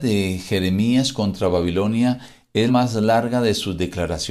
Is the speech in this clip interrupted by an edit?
yes; 1 cut; at 2.7 s

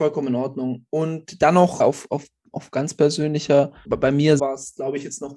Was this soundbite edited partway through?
yes; 3 cuts; at 1.8 s, 3.8 s, 4.4 s

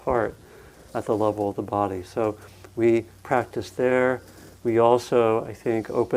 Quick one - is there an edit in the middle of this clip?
no; 0 cuts

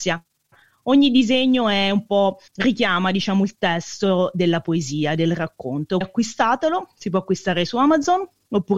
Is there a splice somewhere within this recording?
yes; 2 cuts; at 2.5 s, 6.0 s

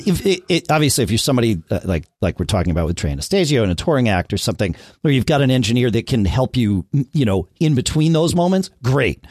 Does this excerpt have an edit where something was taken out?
no; 0 cuts

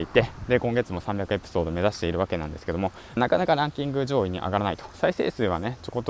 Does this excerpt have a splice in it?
yes; 1 cut; at 3.2 s

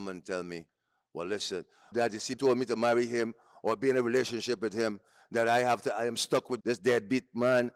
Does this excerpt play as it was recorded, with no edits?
no; 3 cuts; at 1.9 s, 2.4 s, 6.6 s

